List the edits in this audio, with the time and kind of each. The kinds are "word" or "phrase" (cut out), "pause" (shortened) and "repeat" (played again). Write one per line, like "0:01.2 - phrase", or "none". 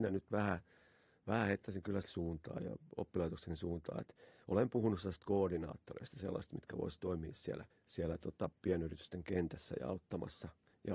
0:02.0 - word
0:02.6 - word
0:07.7 - pause